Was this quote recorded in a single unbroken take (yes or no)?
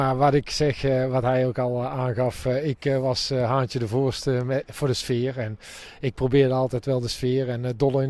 yes